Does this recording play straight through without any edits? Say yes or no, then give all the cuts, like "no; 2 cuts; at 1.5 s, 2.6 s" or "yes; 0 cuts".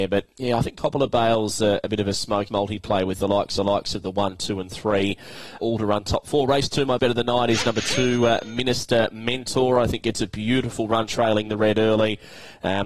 no; 4 cuts; at 2.5 s, 3.6 s, 5.6 s, 7.0 s